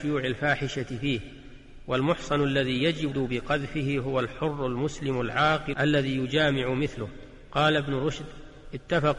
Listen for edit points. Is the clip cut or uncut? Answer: cut